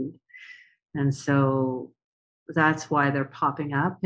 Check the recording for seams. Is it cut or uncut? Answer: uncut